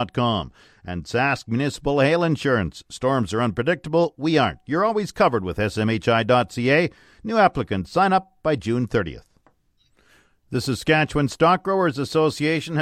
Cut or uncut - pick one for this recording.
uncut